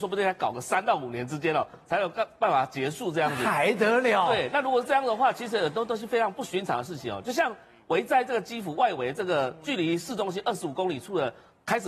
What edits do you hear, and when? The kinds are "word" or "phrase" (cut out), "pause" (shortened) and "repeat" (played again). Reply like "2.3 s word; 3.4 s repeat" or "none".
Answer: none